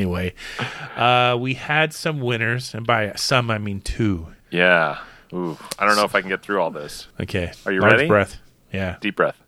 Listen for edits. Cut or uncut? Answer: cut